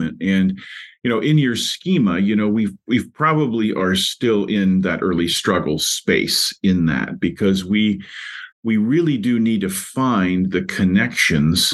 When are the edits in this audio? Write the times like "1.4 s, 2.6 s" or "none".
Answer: 8.5 s